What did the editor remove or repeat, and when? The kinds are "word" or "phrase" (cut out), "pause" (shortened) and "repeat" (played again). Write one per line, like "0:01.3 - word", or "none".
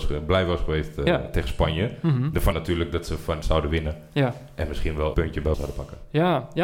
0:02.5 - word
0:03.4 - word
0:05.1 - word
0:05.5 - word